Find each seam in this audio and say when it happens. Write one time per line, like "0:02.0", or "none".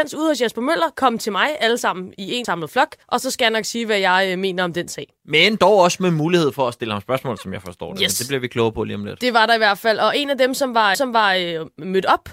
0:02.4
0:03.0
0:10.9